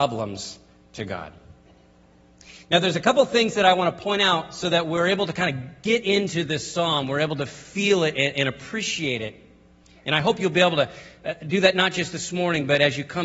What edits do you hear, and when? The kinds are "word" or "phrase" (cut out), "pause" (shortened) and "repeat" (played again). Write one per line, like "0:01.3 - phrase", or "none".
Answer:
none